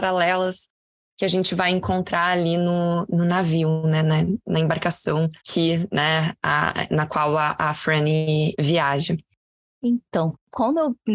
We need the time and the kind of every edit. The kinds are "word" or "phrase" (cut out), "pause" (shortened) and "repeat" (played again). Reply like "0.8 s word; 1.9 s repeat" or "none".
none